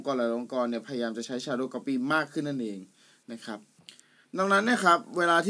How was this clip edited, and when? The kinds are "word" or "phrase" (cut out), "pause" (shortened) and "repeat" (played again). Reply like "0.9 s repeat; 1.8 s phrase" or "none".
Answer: none